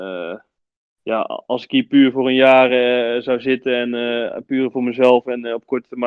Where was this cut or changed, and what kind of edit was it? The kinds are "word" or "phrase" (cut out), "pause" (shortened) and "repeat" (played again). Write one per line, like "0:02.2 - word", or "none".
none

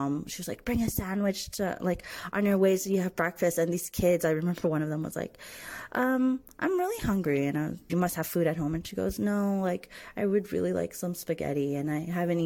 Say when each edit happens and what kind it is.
0:07.9 - phrase

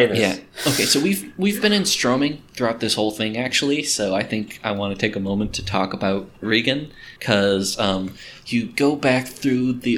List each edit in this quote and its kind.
0:07.2 - pause

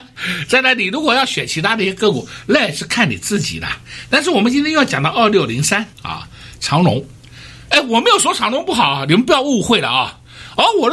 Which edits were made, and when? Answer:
0:05.9 - pause

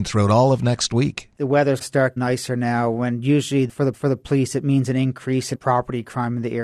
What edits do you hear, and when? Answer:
0:01.3 - pause
0:01.8 - word
0:02.2 - word
0:03.9 - repeat
0:05.5 - phrase

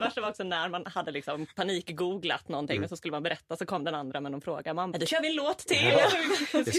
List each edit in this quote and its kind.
0:04.9 - word

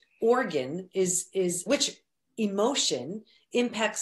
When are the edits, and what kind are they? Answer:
0:01.7 - word

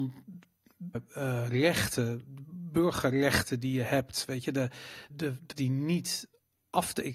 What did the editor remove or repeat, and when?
0:00.9 - word
0:05.1 - word
0:05.5 - word

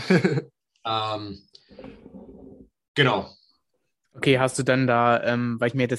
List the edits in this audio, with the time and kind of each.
none

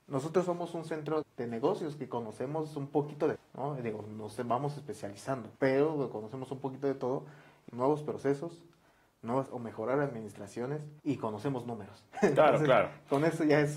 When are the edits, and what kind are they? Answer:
0:01.2 - word
0:03.4 - word
0:05.6 - pause
0:07.7 - phrase
0:09.5 - word
0:11.0 - pause

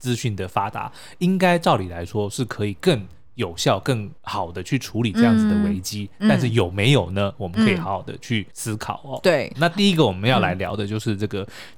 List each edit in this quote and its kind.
0:04.2 - pause
0:08.5 - pause
0:09.5 - word

